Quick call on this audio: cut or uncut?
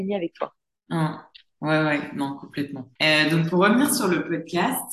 uncut